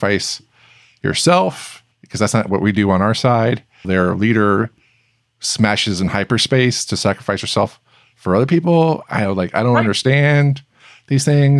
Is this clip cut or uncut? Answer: cut